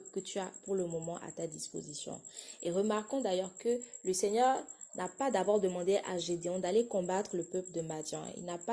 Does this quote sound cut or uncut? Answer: uncut